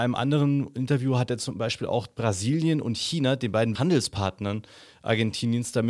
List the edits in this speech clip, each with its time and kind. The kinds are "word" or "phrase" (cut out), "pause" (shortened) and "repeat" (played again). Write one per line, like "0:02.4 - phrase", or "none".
0:03.8 - word